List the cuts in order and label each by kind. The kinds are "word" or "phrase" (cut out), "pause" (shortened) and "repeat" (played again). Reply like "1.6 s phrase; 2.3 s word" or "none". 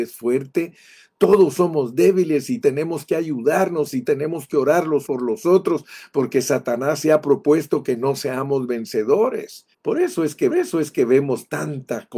2.6 s word; 4.0 s word; 5.1 s word; 9.7 s pause; 10.5 s repeat